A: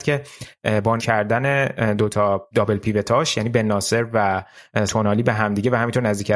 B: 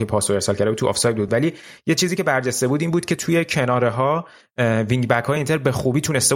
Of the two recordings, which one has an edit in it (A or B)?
A